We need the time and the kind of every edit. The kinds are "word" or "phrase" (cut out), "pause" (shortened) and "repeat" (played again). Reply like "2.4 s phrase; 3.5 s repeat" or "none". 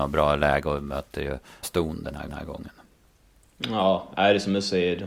1.6 s word; 2.3 s repeat

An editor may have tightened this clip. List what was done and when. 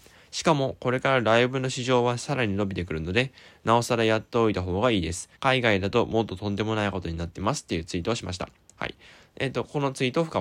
5.4 s pause

